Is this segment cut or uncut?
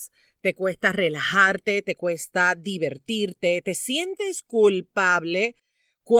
uncut